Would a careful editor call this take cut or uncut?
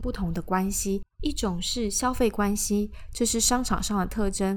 cut